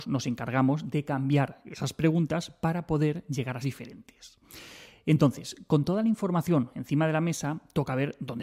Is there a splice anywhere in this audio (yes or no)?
yes